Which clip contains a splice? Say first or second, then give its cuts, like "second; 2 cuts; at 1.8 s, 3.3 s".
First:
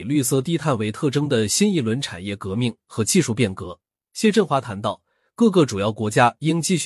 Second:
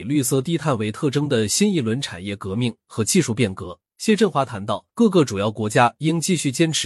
second; 2 cuts; at 3.8 s, 4.9 s